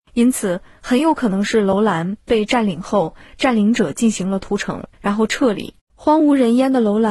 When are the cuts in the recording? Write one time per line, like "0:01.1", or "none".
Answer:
0:04.9
0:05.8